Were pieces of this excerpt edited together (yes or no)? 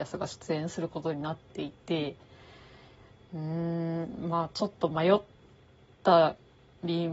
no